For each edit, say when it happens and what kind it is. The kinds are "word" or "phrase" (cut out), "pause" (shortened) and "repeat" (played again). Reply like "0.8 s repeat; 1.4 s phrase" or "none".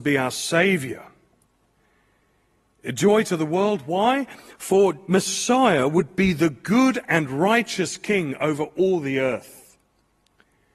none